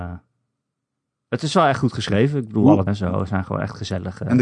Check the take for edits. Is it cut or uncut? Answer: cut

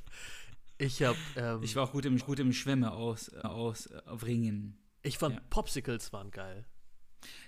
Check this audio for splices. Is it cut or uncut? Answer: cut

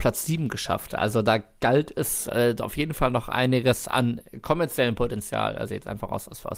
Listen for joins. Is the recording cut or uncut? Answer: uncut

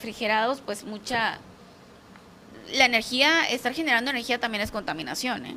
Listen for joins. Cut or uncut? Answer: uncut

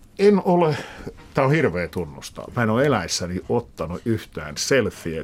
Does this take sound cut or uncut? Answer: uncut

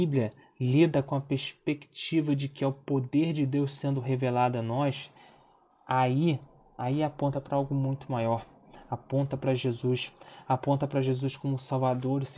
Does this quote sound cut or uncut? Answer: uncut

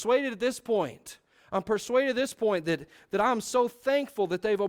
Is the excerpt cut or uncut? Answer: uncut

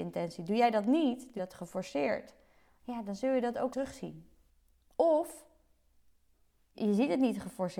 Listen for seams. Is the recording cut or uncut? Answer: cut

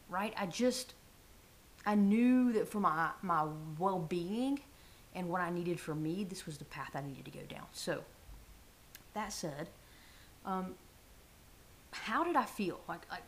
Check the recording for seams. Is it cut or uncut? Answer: uncut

